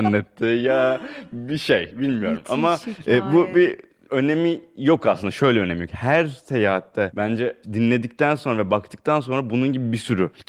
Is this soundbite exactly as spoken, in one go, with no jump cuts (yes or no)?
yes